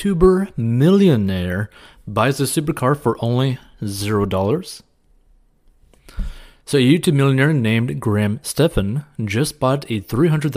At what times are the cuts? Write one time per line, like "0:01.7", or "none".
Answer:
none

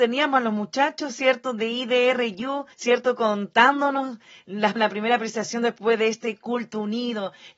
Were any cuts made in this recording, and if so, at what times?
0:02.7
0:04.8

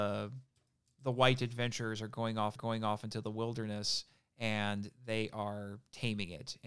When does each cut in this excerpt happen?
0:02.6

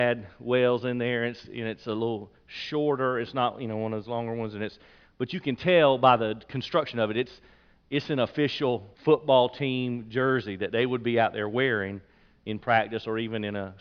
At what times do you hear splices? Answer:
0:08.9

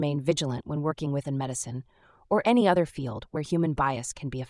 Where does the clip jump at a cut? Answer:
0:01.2

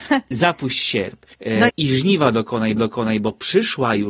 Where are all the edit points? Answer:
0:01.3
0:01.7
0:02.8

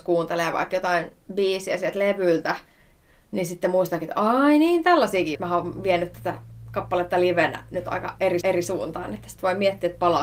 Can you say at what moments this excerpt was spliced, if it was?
0:05.3
0:08.4

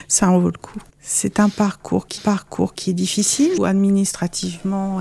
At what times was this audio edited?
0:00.9
0:02.2
0:03.6

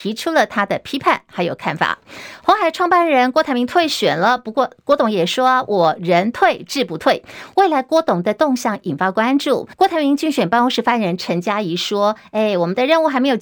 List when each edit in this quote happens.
0:09.7

